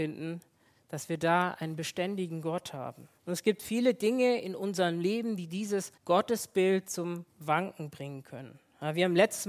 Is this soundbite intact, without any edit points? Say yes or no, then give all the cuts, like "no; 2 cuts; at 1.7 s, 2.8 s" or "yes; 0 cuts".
no; 2 cuts; at 3.2 s, 6.0 s